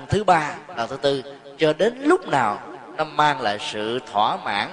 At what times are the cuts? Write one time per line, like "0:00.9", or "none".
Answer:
none